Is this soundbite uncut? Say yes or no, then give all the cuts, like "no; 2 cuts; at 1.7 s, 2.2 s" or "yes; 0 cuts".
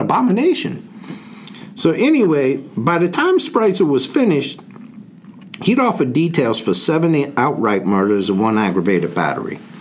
yes; 0 cuts